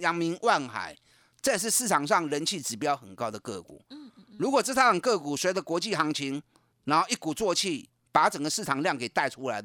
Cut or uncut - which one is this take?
uncut